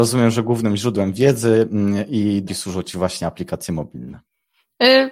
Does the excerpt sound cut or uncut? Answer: cut